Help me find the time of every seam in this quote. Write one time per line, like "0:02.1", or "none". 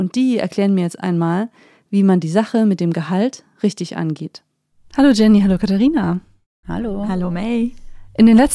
none